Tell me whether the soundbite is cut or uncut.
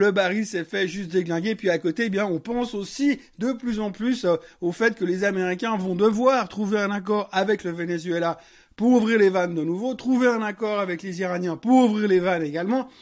uncut